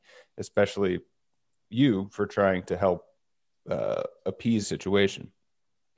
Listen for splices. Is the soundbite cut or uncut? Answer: cut